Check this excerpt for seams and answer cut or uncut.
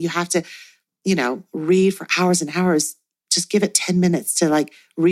uncut